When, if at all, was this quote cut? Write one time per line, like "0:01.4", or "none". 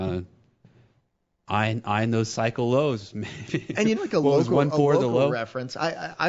0:04.0